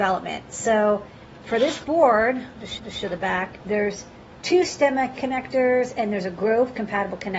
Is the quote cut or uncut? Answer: cut